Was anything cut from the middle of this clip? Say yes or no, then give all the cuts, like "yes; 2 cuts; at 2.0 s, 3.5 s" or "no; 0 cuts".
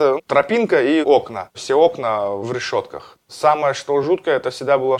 no; 0 cuts